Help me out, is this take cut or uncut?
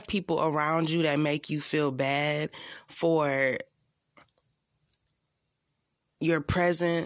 uncut